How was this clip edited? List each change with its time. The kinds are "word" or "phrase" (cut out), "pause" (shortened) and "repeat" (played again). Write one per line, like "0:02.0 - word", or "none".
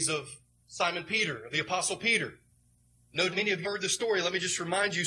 0:03.3 - word
0:03.6 - word

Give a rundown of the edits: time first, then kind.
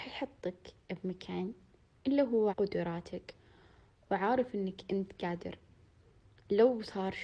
0:02.5 - word

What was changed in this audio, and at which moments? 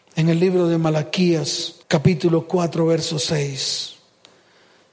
0:01.8 - pause

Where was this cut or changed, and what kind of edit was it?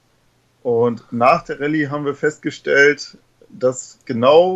none

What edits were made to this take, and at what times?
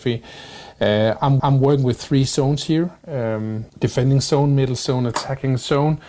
0:01.4 - repeat
0:03.7 - pause

